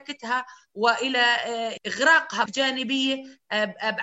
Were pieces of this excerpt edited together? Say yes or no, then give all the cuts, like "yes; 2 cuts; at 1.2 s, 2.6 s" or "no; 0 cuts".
yes; 2 cuts; at 1.8 s, 2.5 s